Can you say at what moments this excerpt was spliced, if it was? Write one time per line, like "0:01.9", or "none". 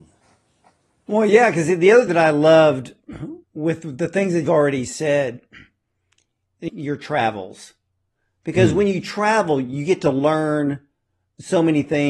0:02.1
0:03.4
0:04.4
0:06.7